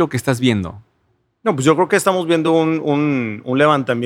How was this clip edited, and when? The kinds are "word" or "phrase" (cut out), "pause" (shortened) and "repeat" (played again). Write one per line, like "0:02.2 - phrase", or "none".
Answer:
none